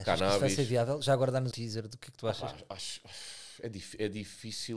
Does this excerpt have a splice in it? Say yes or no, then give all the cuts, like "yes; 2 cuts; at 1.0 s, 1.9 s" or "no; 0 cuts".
yes; 1 cut; at 1.5 s